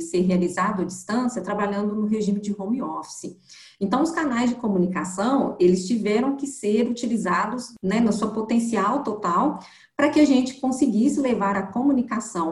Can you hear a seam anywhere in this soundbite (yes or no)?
no